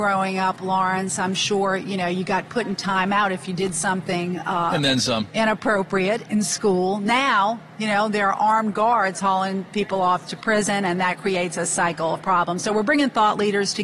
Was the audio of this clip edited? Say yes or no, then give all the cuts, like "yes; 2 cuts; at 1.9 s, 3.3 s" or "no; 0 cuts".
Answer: no; 0 cuts